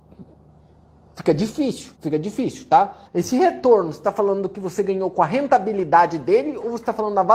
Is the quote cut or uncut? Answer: cut